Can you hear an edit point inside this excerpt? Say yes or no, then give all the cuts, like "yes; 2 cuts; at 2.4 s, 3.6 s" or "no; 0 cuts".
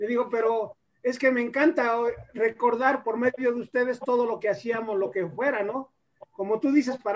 no; 0 cuts